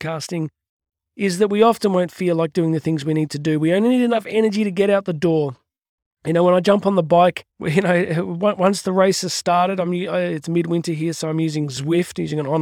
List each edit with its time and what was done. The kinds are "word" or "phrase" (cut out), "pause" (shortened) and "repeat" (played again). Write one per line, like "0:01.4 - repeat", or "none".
0:07.5 - pause